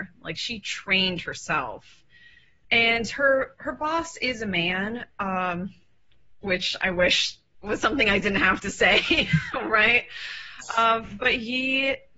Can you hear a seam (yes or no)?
no